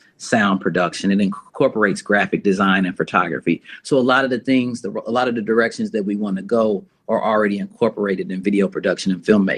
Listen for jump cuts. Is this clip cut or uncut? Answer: uncut